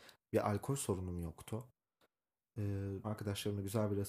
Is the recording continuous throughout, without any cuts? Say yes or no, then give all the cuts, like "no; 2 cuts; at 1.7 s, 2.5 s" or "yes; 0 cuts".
no; 1 cut; at 3.0 s